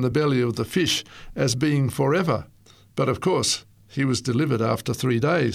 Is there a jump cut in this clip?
yes; 1 cut; at 2.7 s

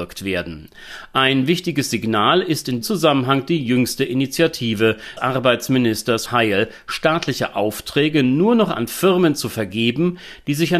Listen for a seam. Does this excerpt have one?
yes; 3 cuts; at 2.8 s, 5.2 s, 6.3 s

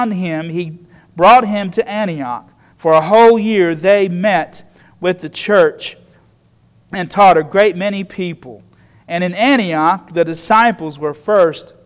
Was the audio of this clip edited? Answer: no; 0 cuts

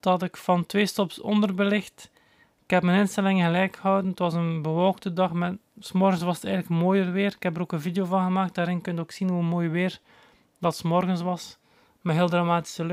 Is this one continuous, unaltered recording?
yes; 0 cuts

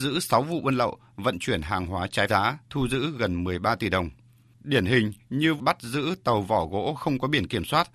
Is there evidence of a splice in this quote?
yes; 3 cuts; at 2.3 s, 2.6 s, 5.6 s

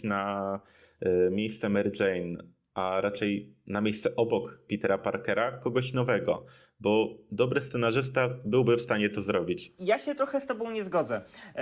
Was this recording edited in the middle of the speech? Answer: no; 0 cuts

